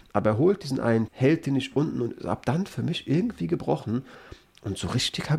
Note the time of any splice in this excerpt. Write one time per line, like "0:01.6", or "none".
0:01.1